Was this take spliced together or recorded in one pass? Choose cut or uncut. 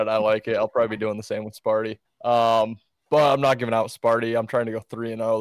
cut